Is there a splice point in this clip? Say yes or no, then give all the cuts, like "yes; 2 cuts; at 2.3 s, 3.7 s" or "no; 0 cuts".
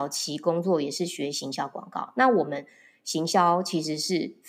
no; 0 cuts